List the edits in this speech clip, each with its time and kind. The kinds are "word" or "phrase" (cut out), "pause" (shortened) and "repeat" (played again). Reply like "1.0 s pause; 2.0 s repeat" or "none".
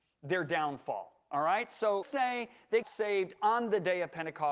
2.0 s word; 2.8 s word